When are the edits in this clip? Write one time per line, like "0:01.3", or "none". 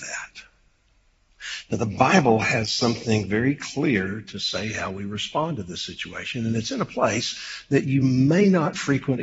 none